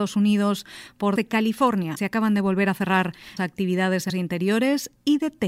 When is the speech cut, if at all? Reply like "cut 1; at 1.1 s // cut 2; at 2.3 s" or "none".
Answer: cut 1; at 1.2 s // cut 2; at 2.0 s // cut 3; at 3.4 s // cut 4; at 4.1 s

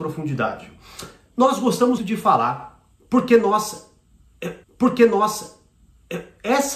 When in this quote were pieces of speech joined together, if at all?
cut 1; at 2.0 s // cut 2; at 4.6 s

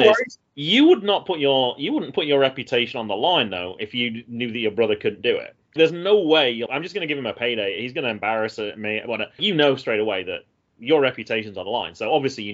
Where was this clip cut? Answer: cut 1; at 5.8 s // cut 2; at 6.7 s // cut 3; at 9.4 s

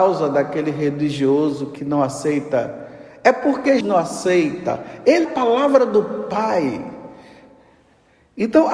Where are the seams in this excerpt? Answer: cut 1; at 1.8 s // cut 2; at 3.8 s // cut 3; at 5.2 s

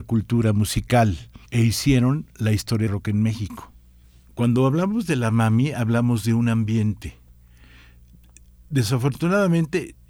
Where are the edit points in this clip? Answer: cut 1; at 1.5 s // cut 2; at 2.9 s // cut 3; at 4.0 s

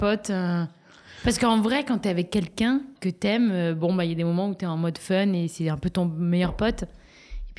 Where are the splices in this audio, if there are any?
cut 1; at 3.0 s

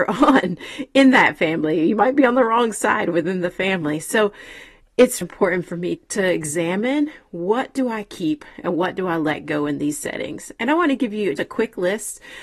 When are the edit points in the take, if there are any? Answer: cut 1; at 5.2 s // cut 2; at 6.0 s // cut 3; at 11.4 s

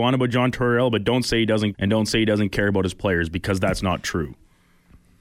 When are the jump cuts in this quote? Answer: cut 1; at 1.7 s // cut 2; at 3.8 s

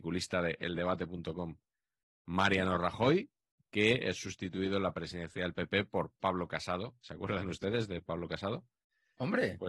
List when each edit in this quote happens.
none

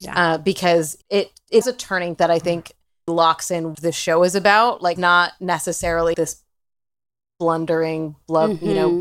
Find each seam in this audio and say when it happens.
cut 1; at 1.0 s // cut 2; at 1.6 s // cut 3; at 2.2 s // cut 4; at 3.1 s // cut 5; at 3.7 s // cut 6; at 5.0 s // cut 7; at 6.1 s

